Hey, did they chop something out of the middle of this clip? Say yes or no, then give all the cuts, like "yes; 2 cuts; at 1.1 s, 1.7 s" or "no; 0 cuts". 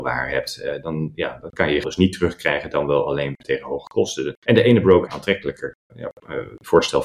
yes; 4 cuts; at 1.8 s, 4.4 s, 5.1 s, 5.9 s